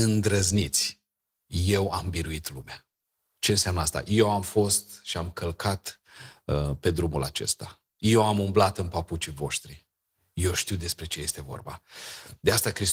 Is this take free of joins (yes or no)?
yes